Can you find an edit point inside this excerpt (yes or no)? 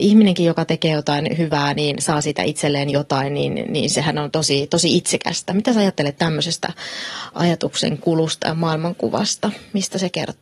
no